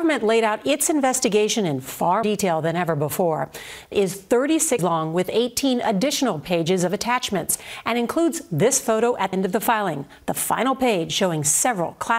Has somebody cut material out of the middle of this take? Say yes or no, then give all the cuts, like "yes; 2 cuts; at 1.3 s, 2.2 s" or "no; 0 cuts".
yes; 4 cuts; at 2.2 s, 3.9 s, 4.8 s, 9.3 s